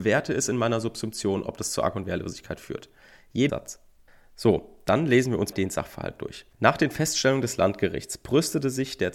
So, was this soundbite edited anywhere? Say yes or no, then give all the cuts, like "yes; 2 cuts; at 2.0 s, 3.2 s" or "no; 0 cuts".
yes; 4 cuts; at 3.5 s, 4.1 s, 5.5 s, 6.5 s